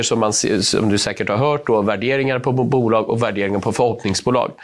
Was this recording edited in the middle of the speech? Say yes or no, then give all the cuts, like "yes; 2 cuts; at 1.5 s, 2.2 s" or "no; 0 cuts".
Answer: no; 0 cuts